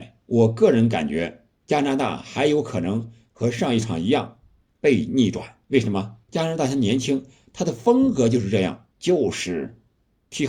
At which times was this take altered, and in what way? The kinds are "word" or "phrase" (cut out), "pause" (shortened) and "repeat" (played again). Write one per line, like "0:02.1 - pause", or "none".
0:01.5 - pause
0:05.6 - pause
0:06.2 - pause
0:08.9 - pause